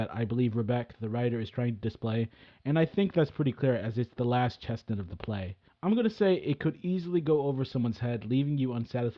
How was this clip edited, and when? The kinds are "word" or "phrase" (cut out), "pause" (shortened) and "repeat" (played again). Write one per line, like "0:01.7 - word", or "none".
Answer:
0:05.7 - pause